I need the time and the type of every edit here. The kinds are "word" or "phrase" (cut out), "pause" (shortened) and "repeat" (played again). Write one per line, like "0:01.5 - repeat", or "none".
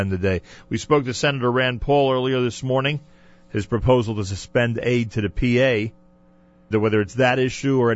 0:06.7 - word